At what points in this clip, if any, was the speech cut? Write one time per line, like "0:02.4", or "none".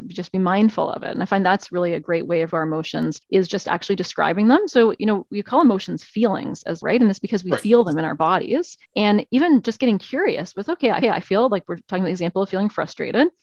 0:02.5
0:03.2
0:06.8
0:08.8
0:11.0

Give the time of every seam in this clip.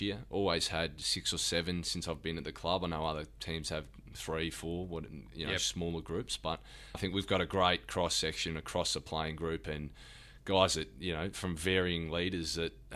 0:06.9

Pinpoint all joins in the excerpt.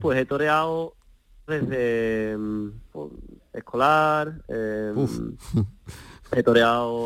0:01.5
0:02.9
0:03.4

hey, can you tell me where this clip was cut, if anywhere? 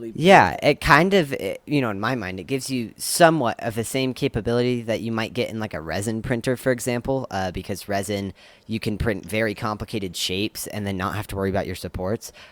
none

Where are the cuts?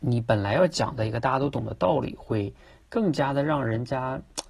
none

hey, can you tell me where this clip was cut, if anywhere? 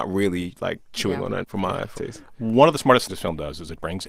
0:01.4
0:01.9
0:03.1

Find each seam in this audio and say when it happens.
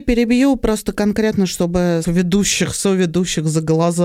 0:02.0

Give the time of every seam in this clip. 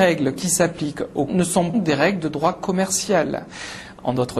0:01.3
0:01.7

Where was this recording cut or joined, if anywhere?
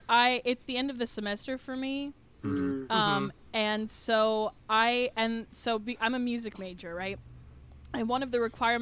none

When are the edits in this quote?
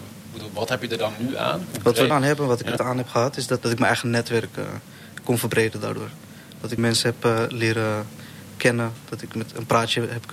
0:02.1
0:02.8
0:03.6
0:06.8

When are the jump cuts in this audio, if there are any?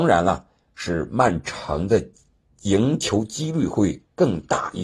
none

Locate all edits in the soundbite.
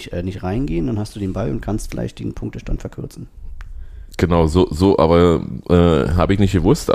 none

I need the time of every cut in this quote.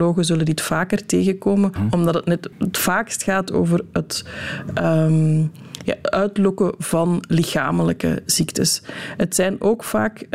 0:01.8
0:02.5

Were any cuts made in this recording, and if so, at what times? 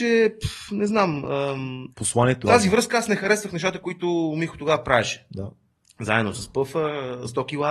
0:01.9
0:02.4
0:06.3

